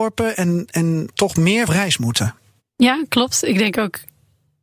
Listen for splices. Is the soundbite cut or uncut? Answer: cut